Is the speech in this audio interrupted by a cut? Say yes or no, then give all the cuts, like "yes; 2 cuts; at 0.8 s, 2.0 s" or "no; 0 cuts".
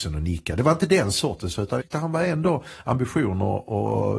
yes; 1 cut; at 1.8 s